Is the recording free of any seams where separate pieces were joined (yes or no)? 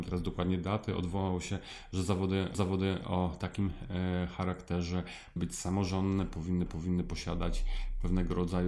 no